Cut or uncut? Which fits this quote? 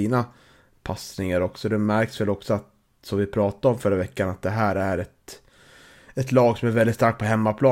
uncut